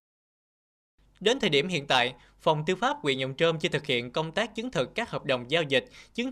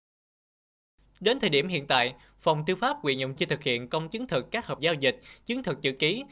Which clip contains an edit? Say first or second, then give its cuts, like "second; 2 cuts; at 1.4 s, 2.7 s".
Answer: second; 3 cuts; at 3.4 s, 4.1 s, 4.8 s